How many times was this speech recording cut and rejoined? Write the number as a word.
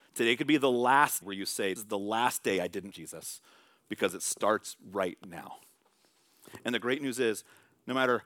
three